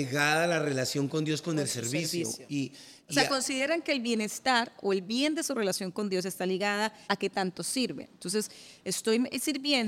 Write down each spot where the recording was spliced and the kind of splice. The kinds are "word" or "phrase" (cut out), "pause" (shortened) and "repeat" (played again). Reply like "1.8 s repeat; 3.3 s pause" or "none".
7.0 s pause